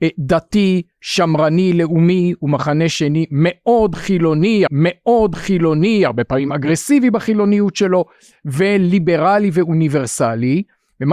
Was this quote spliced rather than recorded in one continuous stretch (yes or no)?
yes